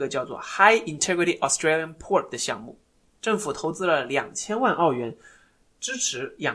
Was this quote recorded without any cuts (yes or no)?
yes